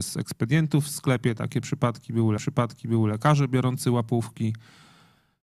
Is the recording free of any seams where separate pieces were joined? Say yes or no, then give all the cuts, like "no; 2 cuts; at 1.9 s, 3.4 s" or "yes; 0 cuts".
no; 1 cut; at 2.4 s